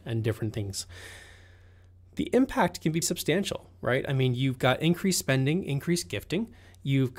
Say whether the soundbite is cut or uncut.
cut